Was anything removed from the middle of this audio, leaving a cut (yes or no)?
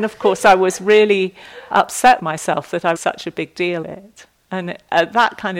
yes